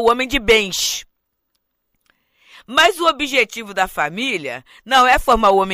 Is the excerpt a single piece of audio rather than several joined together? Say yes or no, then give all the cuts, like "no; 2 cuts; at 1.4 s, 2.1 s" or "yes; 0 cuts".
yes; 0 cuts